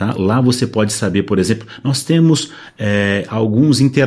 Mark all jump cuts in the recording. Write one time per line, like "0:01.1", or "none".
none